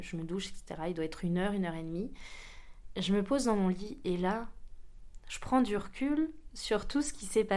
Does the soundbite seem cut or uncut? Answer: uncut